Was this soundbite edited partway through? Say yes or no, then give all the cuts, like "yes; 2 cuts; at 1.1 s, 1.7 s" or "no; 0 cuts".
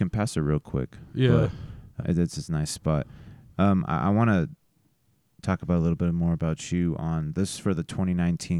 yes; 1 cut; at 2.0 s